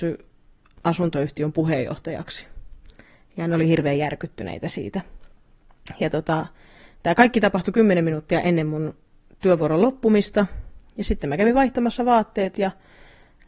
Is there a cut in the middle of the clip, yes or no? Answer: no